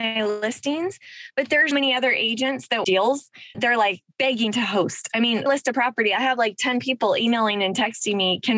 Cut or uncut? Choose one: cut